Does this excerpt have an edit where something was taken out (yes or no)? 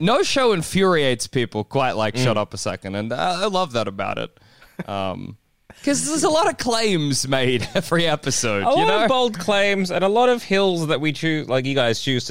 no